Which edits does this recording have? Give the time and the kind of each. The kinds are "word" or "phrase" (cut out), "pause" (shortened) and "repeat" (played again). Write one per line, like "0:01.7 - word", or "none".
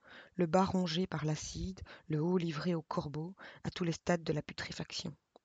none

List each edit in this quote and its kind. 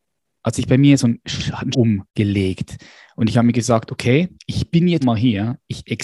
0:01.7 - word
0:02.1 - pause
0:04.3 - pause
0:05.0 - word

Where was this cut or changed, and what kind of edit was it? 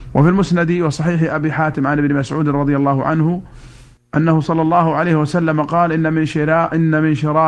0:04.0 - pause

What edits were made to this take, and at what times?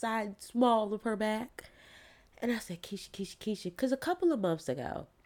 none

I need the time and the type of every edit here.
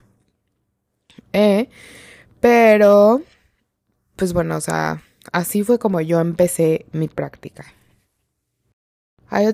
none

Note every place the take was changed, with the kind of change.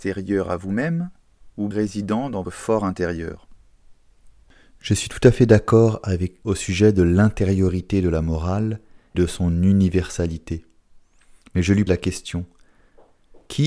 0:01.7 - word
0:02.4 - word
0:06.4 - word
0:09.1 - word
0:11.9 - word

